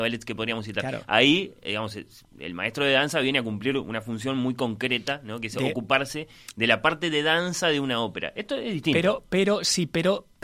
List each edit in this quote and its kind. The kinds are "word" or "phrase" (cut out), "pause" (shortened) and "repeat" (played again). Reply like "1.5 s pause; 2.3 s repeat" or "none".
none